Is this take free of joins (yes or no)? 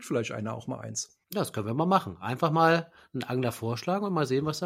no